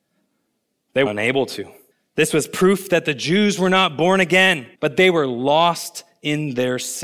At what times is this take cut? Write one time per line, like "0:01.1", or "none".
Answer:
0:01.1
0:01.9
0:04.7